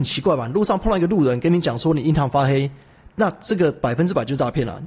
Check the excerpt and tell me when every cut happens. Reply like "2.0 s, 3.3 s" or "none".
none

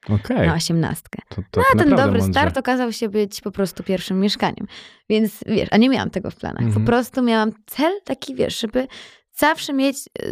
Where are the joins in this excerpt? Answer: none

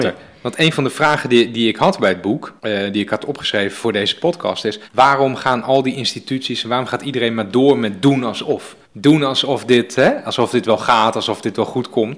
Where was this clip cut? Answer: 2.6 s, 4.9 s, 8.8 s

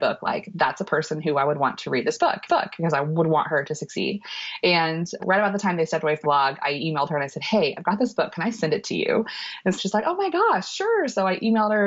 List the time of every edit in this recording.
2.5 s, 5.2 s, 6.2 s, 9.8 s

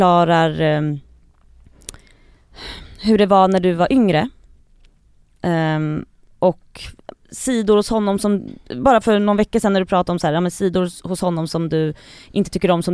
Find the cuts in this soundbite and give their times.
none

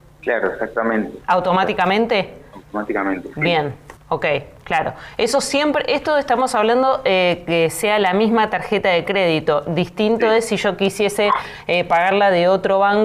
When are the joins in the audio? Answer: 4.0 s

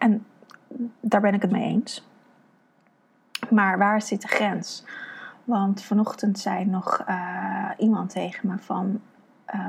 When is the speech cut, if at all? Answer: 1.5 s

